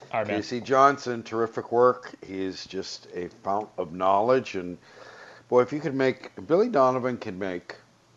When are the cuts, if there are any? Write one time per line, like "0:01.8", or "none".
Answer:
none